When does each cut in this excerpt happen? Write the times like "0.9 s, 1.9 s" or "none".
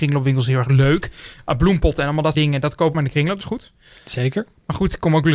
2.3 s, 2.9 s, 3.4 s